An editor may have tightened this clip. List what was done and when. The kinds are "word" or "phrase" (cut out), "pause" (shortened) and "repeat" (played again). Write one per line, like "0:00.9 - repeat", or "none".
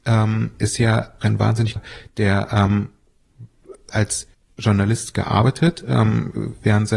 0:01.2 - word
0:01.8 - phrase
0:03.9 - word
0:04.3 - pause